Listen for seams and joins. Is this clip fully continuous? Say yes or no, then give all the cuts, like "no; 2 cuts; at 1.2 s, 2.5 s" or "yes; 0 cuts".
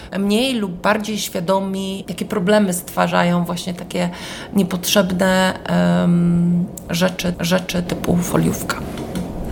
no; 1 cut; at 7.3 s